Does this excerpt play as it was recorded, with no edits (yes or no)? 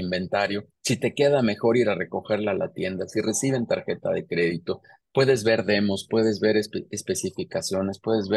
yes